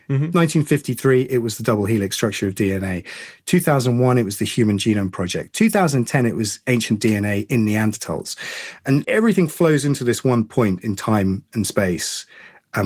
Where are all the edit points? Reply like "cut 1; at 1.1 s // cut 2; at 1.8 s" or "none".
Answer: cut 1; at 9.0 s